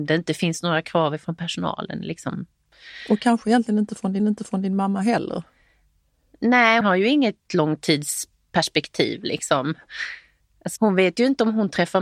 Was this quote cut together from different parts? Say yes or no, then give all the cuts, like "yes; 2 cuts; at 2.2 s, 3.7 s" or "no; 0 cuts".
yes; 3 cuts; at 4.2 s, 6.8 s, 10.8 s